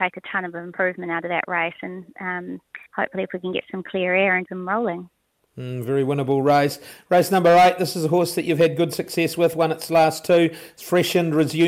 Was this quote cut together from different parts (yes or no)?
yes